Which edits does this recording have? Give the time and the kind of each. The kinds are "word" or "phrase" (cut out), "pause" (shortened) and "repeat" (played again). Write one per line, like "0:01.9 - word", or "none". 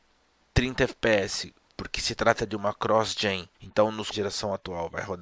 0:03.5 - pause
0:04.1 - phrase